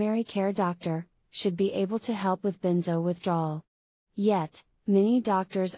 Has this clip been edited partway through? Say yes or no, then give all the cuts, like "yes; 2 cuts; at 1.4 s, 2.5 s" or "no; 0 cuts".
no; 0 cuts